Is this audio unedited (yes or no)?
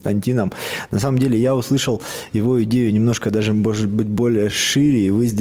yes